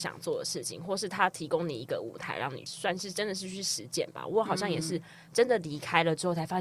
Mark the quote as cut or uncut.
uncut